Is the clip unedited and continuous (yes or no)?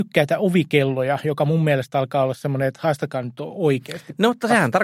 yes